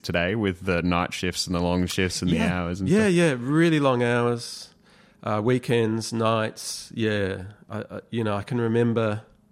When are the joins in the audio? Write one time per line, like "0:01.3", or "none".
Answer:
none